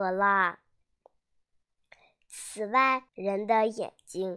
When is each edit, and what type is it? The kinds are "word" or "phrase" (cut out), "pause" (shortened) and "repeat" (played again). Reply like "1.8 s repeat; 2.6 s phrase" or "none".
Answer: 3.1 s pause

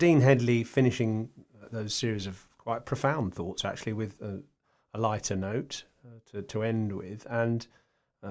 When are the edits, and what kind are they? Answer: none

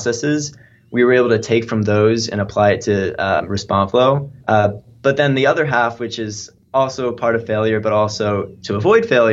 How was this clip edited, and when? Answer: 4.4 s pause

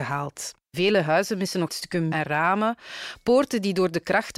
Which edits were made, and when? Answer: 1.7 s word; 2.1 s word

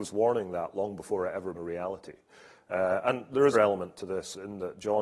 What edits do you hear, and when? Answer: 1.5 s word; 3.5 s word

